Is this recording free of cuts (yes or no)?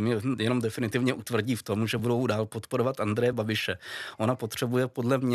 yes